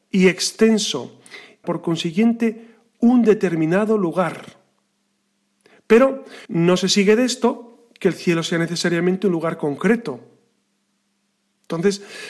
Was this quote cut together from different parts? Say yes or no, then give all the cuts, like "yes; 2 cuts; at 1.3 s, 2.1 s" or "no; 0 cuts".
yes; 2 cuts; at 1.6 s, 6.5 s